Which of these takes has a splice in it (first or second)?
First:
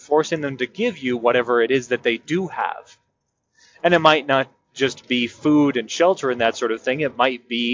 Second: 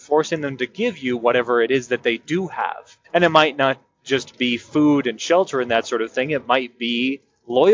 second